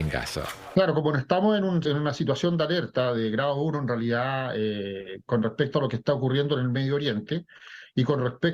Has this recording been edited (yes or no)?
yes